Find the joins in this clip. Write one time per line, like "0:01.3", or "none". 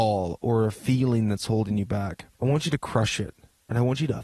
0:02.3